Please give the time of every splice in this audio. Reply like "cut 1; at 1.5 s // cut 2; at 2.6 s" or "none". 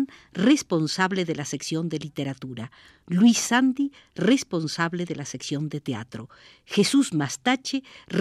none